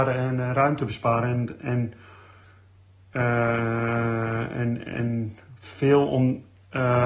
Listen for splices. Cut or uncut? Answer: uncut